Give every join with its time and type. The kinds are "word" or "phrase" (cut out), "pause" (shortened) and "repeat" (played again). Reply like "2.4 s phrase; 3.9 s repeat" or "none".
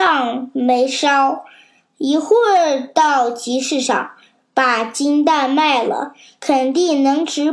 none

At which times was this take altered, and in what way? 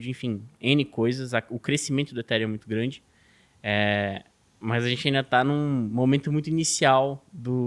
none

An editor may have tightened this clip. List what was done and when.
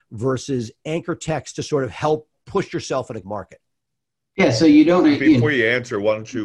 2.4 s word; 3.2 s word; 5.0 s word

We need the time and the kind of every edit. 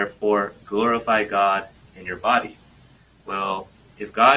none

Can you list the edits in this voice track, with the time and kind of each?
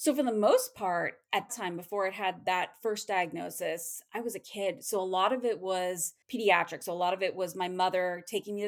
1.5 s word

